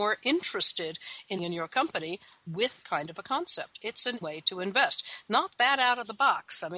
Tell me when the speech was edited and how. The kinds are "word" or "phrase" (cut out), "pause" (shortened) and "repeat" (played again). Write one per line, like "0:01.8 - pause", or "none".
0:01.4 - word
0:02.8 - word
0:04.2 - word